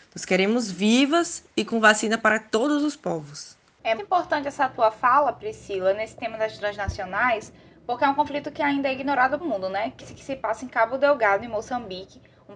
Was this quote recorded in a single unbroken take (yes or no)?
no